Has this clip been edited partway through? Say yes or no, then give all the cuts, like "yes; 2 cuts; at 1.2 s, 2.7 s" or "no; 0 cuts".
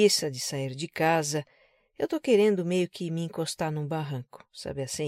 no; 0 cuts